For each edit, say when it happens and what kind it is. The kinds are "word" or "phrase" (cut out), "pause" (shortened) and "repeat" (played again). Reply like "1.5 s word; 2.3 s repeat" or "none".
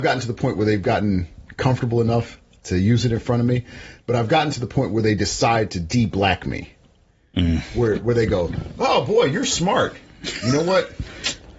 none